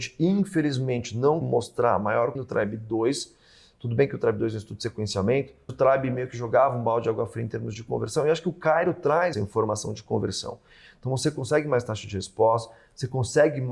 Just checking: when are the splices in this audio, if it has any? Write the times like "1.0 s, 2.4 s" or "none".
1.4 s, 2.3 s, 5.7 s, 9.3 s